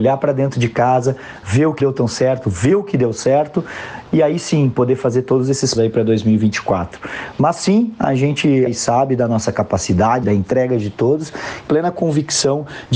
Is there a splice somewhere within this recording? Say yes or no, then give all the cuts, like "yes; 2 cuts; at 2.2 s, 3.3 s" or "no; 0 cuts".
yes; 5 cuts; at 1.8 s, 5.7 s, 8.7 s, 10.2 s, 11.7 s